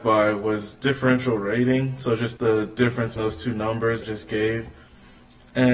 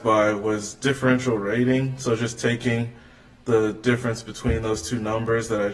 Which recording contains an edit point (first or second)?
first